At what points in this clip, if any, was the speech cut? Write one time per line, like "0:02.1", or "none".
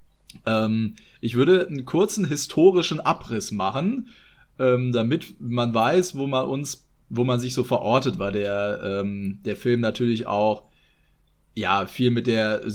none